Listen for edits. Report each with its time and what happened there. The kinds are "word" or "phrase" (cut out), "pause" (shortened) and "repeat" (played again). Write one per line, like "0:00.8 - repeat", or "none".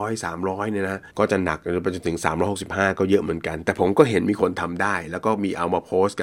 0:01.1 - pause